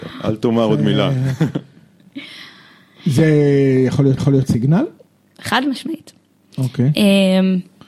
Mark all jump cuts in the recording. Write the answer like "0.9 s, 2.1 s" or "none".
4.2 s